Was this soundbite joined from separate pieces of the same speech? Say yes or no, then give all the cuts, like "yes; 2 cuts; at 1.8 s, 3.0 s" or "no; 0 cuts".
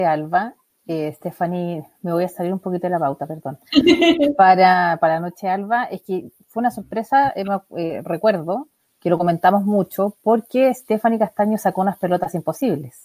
no; 0 cuts